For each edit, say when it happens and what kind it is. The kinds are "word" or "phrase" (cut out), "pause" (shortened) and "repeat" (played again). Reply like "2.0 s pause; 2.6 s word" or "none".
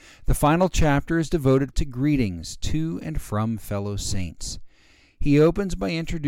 1.7 s word